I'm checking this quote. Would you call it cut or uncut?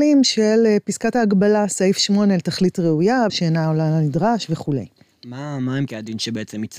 cut